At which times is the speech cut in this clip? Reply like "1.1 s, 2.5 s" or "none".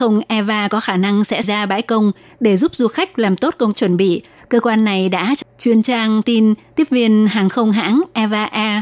1.4 s, 3.7 s, 5.4 s, 6.2 s